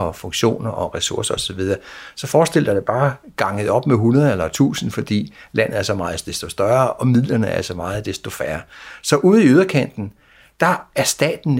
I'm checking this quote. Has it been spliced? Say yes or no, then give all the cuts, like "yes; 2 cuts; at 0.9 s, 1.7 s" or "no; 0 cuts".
no; 0 cuts